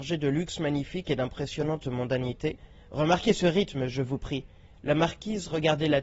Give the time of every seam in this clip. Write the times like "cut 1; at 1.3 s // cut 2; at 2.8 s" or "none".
none